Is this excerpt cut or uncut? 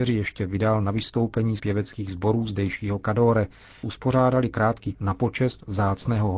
cut